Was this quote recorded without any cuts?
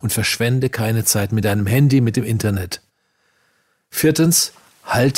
yes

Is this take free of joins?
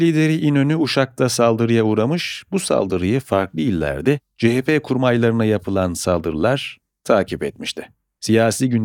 yes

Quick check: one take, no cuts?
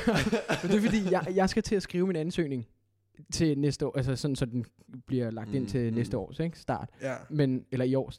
yes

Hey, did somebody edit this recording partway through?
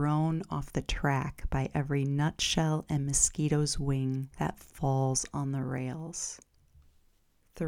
yes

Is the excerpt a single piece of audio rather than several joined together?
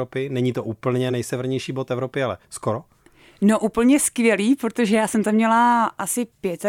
yes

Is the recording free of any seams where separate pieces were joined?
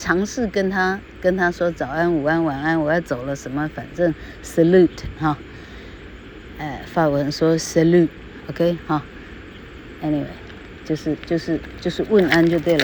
yes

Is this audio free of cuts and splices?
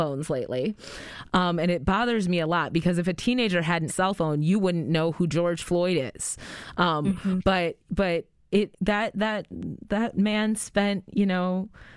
no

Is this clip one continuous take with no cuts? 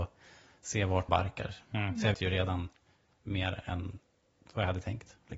no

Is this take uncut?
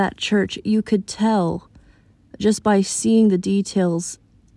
yes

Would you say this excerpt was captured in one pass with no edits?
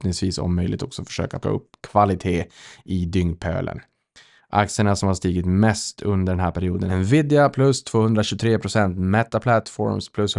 no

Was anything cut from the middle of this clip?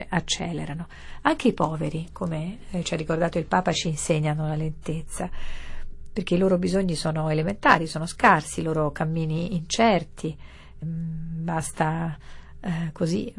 yes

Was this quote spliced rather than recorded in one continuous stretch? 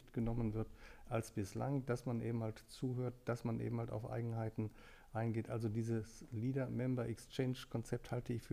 no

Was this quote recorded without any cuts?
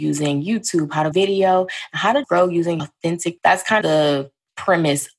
no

